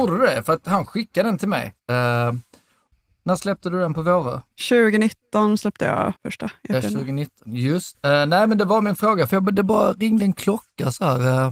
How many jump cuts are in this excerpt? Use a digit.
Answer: 3